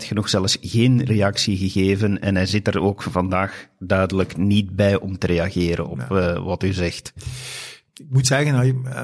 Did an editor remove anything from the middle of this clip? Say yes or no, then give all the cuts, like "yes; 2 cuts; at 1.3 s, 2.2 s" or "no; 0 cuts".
no; 0 cuts